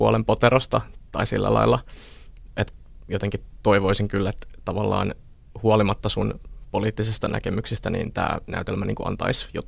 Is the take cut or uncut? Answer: uncut